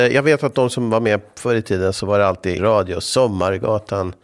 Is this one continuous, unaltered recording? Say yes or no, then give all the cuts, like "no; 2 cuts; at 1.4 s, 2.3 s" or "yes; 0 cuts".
no; 1 cut; at 2.6 s